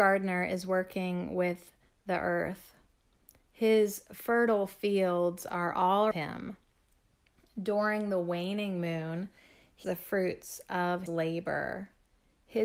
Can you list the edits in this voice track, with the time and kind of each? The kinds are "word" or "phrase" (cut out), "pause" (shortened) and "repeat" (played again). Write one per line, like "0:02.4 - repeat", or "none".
0:06.1 - word
0:09.8 - word
0:11.1 - word